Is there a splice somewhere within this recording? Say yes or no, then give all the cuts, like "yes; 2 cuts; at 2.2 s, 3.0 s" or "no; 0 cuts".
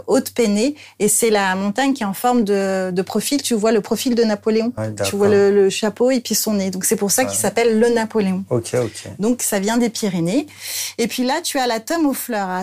no; 0 cuts